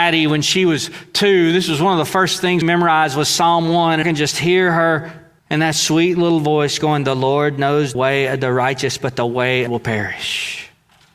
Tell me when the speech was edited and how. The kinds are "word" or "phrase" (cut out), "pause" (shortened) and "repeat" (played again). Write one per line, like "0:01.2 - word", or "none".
0:02.6 - word
0:04.0 - word
0:05.4 - pause
0:07.9 - word
0:09.7 - phrase